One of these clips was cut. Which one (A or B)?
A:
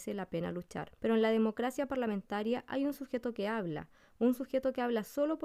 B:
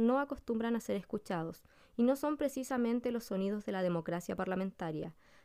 A